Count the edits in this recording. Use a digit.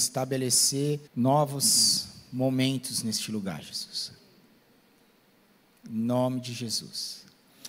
1